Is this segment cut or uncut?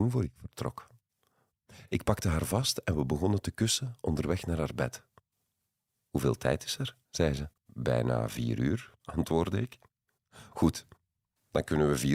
cut